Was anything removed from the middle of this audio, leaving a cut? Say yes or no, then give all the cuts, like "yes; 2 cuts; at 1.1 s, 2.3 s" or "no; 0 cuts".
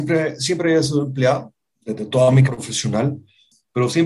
yes; 1 cut; at 2.4 s